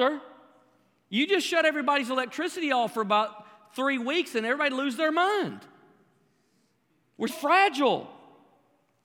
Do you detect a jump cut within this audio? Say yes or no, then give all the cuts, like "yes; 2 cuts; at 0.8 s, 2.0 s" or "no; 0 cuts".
yes; 1 cut; at 7.3 s